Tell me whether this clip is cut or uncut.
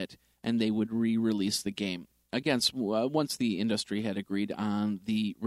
uncut